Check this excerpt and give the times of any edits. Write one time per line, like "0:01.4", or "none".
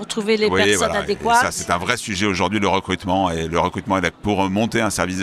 0:04.1